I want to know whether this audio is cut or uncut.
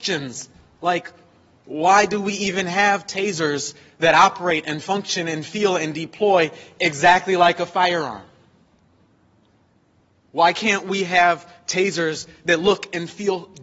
uncut